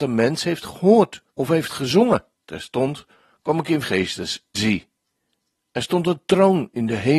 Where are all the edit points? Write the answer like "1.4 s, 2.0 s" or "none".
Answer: 1.3 s, 2.3 s, 3.8 s, 4.5 s

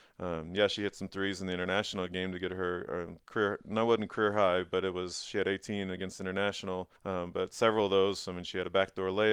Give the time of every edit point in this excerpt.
3.2 s, 7.0 s

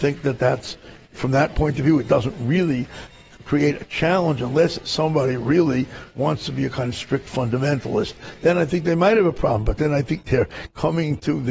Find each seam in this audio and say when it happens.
1.1 s

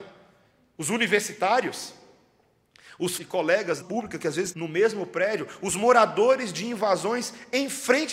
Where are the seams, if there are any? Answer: 3.2 s, 3.8 s, 4.5 s

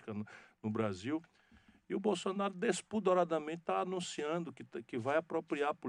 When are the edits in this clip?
none

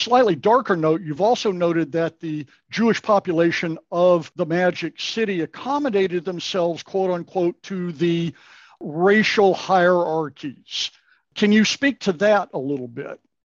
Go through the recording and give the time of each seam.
none

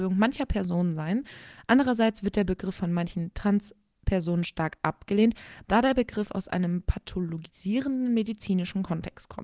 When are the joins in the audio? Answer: none

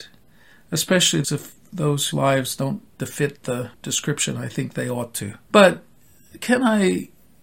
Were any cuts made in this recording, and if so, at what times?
1.2 s, 2.1 s, 3.0 s, 3.7 s, 5.4 s

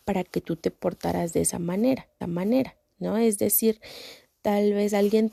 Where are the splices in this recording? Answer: 2.2 s

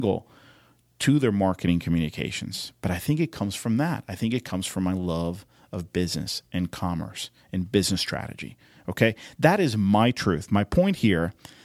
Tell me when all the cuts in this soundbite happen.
none

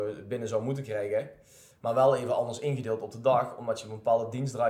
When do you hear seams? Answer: none

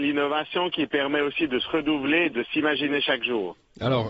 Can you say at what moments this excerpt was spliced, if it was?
2.3 s

